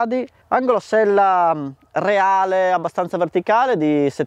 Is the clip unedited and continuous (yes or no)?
yes